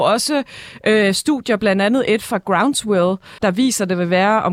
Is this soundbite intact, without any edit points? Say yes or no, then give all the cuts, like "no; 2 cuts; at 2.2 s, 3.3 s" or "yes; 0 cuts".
no; 1 cut; at 3.4 s